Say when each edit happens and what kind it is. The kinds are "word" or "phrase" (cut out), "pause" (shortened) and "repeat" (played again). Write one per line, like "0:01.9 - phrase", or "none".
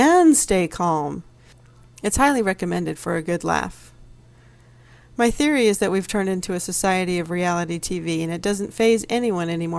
none